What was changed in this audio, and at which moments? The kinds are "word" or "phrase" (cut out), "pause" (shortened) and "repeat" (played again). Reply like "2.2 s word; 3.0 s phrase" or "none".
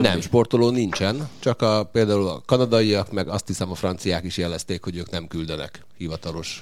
none